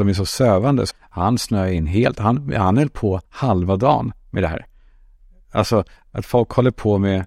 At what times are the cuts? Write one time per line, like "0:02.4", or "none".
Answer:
0:00.9
0:03.3

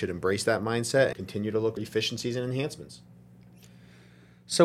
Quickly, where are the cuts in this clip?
0:01.1
0:01.8

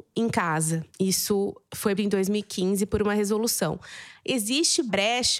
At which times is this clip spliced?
0:02.0

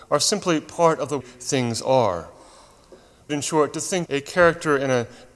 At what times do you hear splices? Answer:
0:01.2
0:03.3
0:04.1

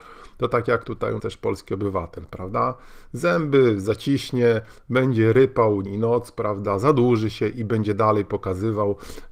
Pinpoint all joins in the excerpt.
0:01.2
0:05.9

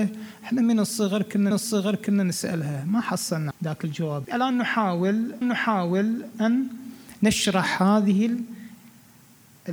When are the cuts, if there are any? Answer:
0:01.5
0:03.5
0:04.2
0:05.4

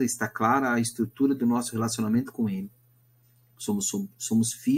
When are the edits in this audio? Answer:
none

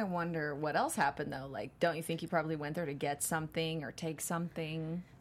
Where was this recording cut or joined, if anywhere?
none

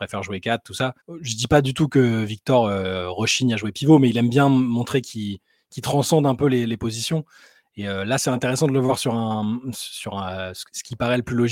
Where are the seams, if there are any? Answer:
0:01.0

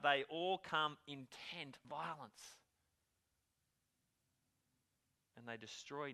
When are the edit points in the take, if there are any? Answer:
0:01.8

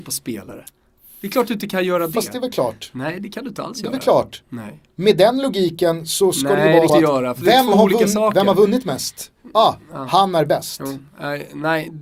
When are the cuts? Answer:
0:06.9

